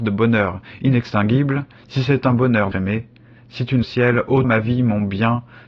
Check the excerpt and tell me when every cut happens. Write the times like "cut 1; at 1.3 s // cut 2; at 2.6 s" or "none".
cut 1; at 2.7 s // cut 2; at 3.8 s // cut 3; at 4.4 s